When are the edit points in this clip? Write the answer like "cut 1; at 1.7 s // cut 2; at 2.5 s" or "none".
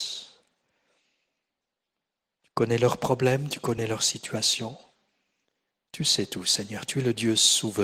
none

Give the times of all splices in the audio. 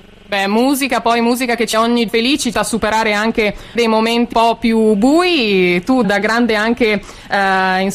cut 1; at 1.7 s // cut 2; at 2.1 s // cut 3; at 2.5 s // cut 4; at 3.8 s // cut 5; at 4.3 s // cut 6; at 6.0 s

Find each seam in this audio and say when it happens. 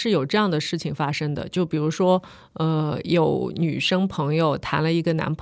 none

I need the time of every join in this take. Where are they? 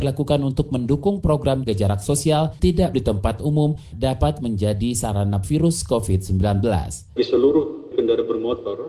cut 1; at 1.7 s // cut 2; at 2.6 s // cut 3; at 2.9 s // cut 4; at 3.9 s // cut 5; at 5.4 s // cut 6; at 7.2 s // cut 7; at 7.9 s

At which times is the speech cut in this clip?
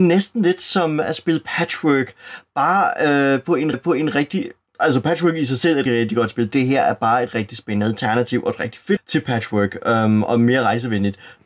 cut 1; at 3.7 s // cut 2; at 5.9 s // cut 3; at 9.0 s

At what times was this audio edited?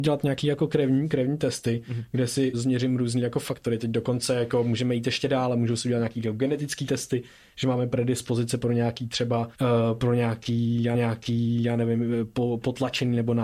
cut 1; at 2.5 s // cut 2; at 9.5 s // cut 3; at 10.9 s

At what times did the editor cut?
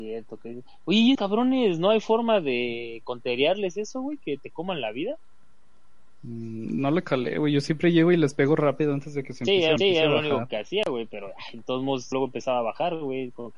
cut 1; at 1.1 s // cut 2; at 9.8 s // cut 3; at 12.1 s

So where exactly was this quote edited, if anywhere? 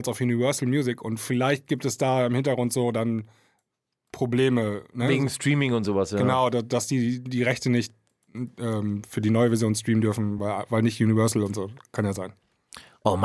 none

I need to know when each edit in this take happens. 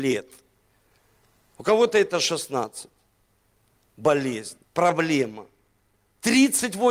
cut 1; at 4.6 s

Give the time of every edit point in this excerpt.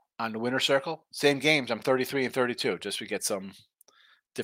none

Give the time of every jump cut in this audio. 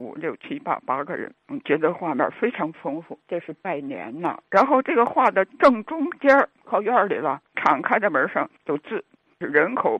cut 1; at 1.4 s // cut 2; at 3.2 s // cut 3; at 4.5 s // cut 4; at 6.6 s // cut 5; at 7.5 s // cut 6; at 8.6 s

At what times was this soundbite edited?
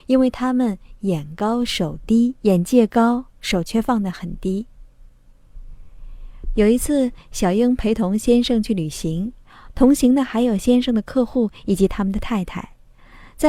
cut 1; at 2.4 s // cut 2; at 3.3 s

